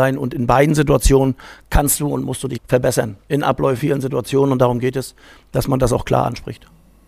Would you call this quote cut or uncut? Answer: cut